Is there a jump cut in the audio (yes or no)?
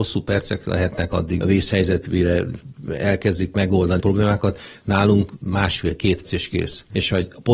yes